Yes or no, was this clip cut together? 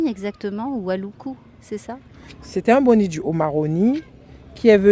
no